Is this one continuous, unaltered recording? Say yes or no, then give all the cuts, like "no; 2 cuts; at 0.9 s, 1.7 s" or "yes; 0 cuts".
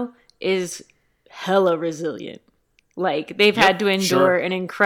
yes; 0 cuts